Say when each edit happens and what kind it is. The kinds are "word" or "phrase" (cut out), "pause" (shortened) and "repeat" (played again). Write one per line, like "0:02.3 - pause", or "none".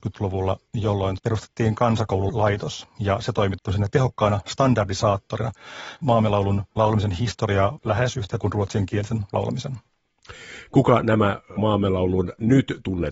0:06.8 - word
0:07.8 - word
0:08.3 - word